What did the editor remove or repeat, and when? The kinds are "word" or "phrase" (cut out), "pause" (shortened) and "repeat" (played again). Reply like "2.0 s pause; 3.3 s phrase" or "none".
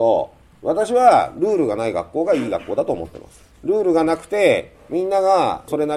3.5 s pause